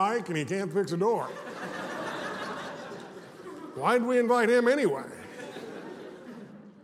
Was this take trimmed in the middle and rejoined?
no; 0 cuts

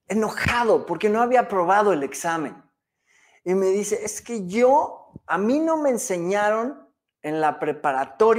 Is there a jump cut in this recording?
no; 0 cuts

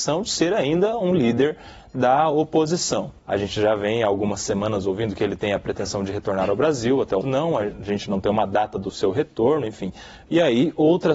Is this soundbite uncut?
no; 2 cuts; at 3.2 s, 7.2 s

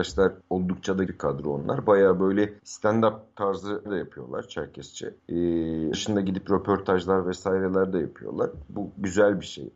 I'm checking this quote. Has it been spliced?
yes; 4 cuts; at 1.1 s, 2.6 s, 3.8 s, 5.9 s

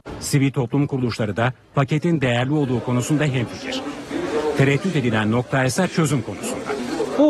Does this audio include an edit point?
no; 0 cuts

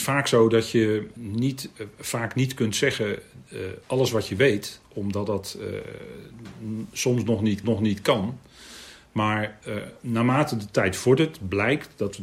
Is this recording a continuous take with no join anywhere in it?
no; 3 cuts; at 1.2 s, 3.8 s, 7.6 s

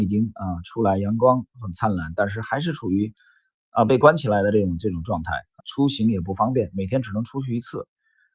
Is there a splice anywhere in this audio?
yes; 1 cut; at 5.6 s

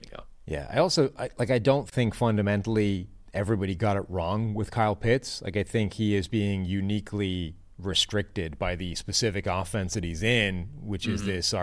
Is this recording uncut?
yes; 0 cuts

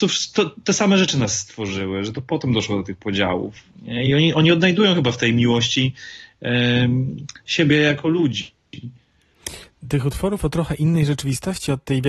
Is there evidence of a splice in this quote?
no; 0 cuts

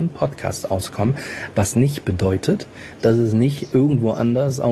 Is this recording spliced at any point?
no; 0 cuts

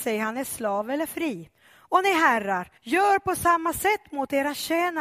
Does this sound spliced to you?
yes; 1 cut; at 2.8 s

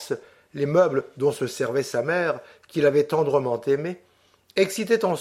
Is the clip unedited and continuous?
yes; 0 cuts

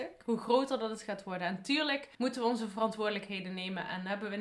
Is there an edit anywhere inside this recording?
yes; 1 cut; at 2.1 s

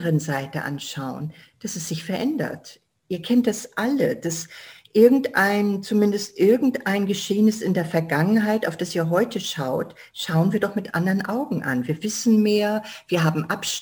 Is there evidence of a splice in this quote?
no; 0 cuts

